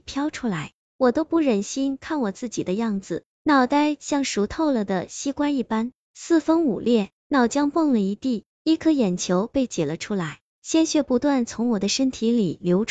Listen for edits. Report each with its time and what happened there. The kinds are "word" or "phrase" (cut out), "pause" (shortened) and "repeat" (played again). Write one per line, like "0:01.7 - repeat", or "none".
0:07.2 - pause